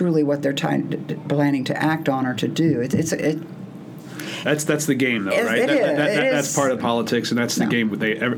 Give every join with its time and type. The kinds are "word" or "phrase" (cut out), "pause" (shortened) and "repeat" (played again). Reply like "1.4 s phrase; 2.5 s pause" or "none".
none